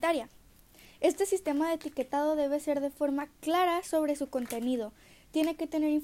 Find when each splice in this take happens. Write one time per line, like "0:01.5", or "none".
none